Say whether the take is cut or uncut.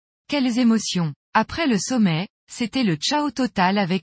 uncut